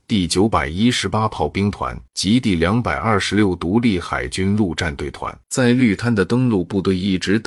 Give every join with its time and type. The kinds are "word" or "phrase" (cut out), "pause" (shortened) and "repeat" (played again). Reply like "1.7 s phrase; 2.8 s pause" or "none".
2.1 s pause; 5.4 s pause